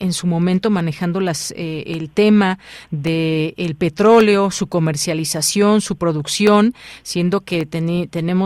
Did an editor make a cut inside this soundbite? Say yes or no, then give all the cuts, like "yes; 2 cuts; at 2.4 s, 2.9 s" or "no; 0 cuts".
no; 0 cuts